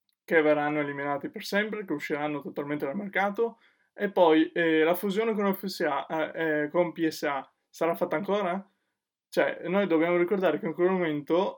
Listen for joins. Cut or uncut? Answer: uncut